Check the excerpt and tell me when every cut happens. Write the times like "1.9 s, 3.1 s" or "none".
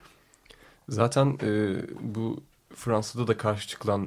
none